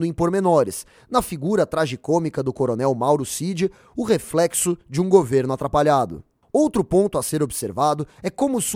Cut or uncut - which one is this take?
uncut